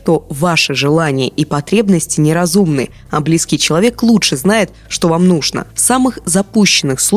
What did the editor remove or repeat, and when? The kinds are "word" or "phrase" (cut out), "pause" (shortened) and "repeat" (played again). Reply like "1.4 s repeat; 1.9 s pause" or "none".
none